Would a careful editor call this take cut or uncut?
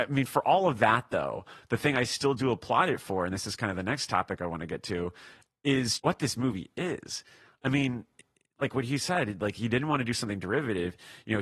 cut